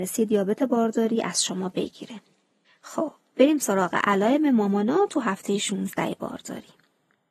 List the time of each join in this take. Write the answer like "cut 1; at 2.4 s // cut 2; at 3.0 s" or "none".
none